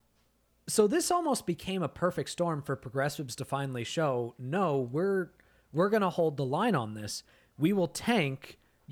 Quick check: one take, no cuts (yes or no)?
yes